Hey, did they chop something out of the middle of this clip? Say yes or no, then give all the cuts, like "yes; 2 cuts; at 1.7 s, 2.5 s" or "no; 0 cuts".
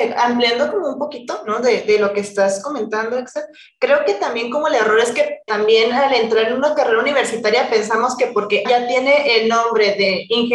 yes; 2 cuts; at 5.5 s, 8.6 s